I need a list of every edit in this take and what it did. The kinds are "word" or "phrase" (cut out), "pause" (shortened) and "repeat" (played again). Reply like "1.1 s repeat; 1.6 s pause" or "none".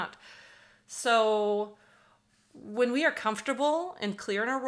none